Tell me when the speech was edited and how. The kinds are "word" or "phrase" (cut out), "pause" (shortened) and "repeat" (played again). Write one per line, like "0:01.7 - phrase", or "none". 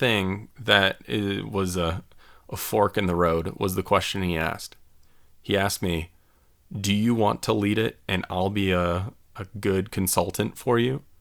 none